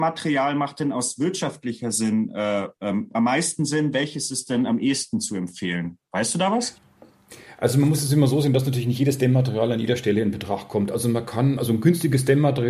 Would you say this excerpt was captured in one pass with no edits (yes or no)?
no